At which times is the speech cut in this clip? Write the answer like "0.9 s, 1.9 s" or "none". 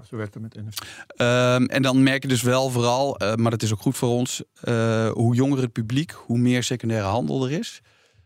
none